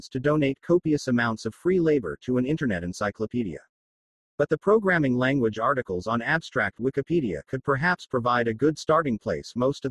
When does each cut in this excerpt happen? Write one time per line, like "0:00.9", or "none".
none